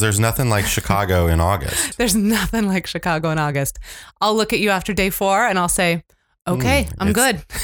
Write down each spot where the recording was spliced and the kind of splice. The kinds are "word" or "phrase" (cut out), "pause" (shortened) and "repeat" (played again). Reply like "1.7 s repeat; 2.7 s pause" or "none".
none

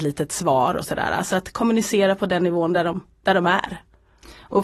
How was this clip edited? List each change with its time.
none

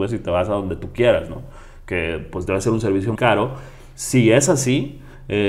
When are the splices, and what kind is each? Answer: 3.2 s word

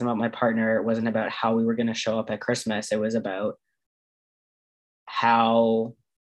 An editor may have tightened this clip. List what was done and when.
none

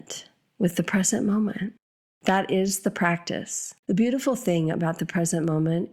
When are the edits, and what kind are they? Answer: 1.8 s pause; 3.8 s pause

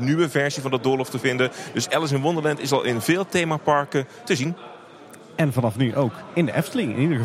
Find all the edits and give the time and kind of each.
none

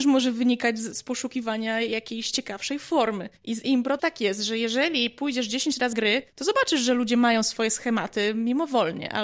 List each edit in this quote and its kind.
0.9 s word; 3.4 s pause; 4.0 s word; 5.9 s word; 6.3 s pause

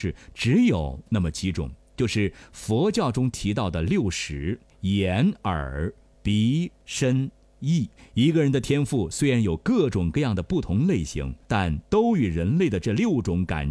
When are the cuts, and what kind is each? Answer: 4.7 s pause; 6.7 s word; 8.0 s pause; 11.4 s pause

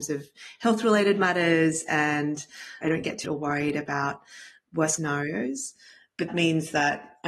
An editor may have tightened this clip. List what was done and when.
2.8 s word; 3.2 s word; 5.0 s word; 6.3 s word

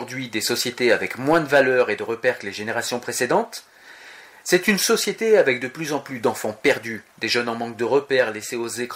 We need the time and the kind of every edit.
none

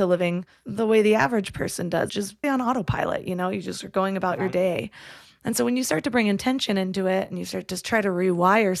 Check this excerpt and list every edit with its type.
2.1 s word; 2.4 s word

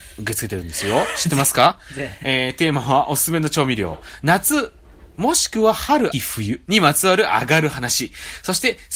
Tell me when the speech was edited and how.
6.1 s word

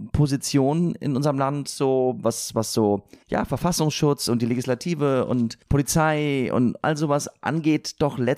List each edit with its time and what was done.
2.5 s word; 3.2 s pause; 5.6 s pause

